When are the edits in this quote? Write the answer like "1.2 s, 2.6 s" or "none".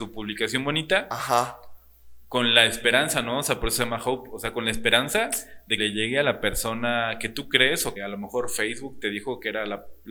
5.8 s, 8.0 s